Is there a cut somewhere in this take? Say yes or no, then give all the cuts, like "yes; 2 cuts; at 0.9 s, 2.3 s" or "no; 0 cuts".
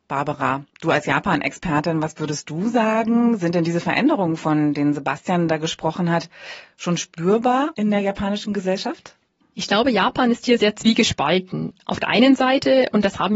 no; 0 cuts